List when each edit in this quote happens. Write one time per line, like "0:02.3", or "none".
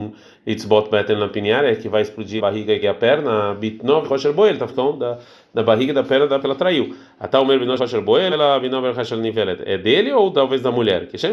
0:02.4
0:02.8
0:04.0
0:04.7
0:06.4
0:07.8
0:08.3

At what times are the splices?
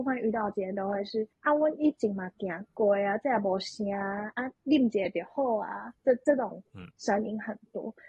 0:01.3
0:04.5
0:06.0

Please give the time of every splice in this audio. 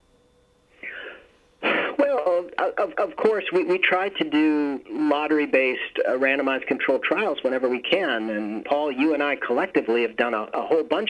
0:02.9
0:08.6

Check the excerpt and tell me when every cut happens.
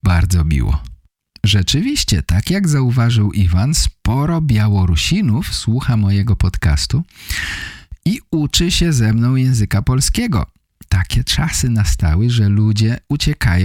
none

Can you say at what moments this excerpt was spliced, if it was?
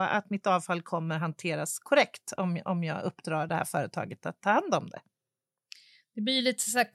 none

